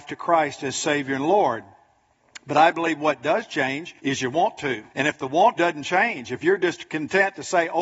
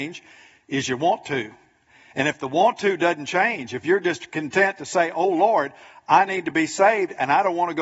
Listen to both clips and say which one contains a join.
first; 3 cuts; at 4.0 s, 4.9 s, 5.6 s

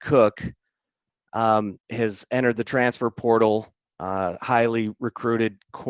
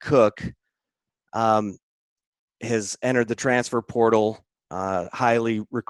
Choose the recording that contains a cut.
first; 1 cut; at 1.8 s

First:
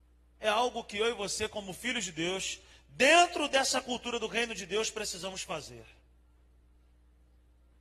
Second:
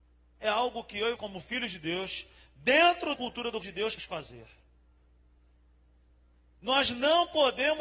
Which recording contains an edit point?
second; 4 cuts; at 1.2 s, 3.2 s, 3.6 s, 4.0 s

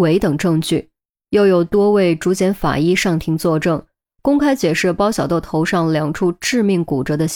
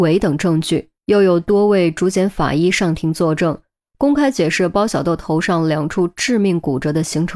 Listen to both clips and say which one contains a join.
second; 1 cut; at 1.0 s

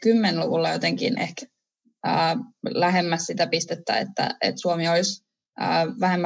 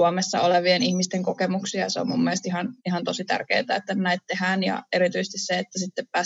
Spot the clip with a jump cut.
second; 1 cut; at 2.8 s

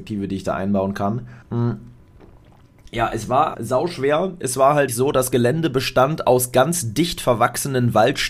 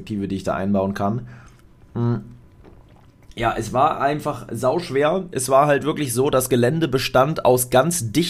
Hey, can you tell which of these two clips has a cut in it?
first; 3 cuts; at 1.4 s, 3.5 s, 4.9 s

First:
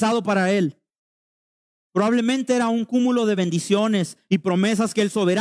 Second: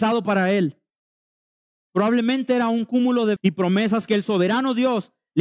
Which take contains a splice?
second; 1 cut; at 3.4 s

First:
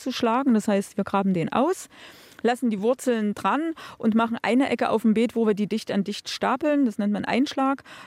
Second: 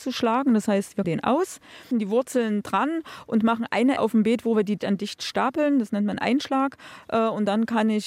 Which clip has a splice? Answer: second; 4 cuts; at 1.0 s, 1.9 s, 4.0 s, 4.8 s

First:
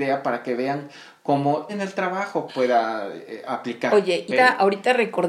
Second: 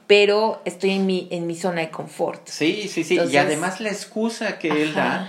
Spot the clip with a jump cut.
first; 3 cuts; at 1.7 s, 2.5 s, 4.3 s

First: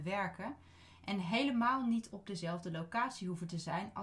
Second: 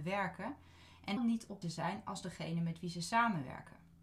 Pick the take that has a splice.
second; 2 cuts; at 1.2 s, 1.6 s

